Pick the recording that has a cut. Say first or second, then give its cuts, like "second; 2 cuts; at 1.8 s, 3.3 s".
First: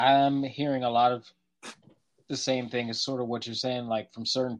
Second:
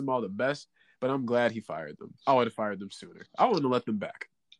second; 1 cut; at 2.2 s